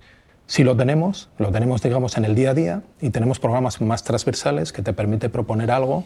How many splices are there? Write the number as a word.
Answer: zero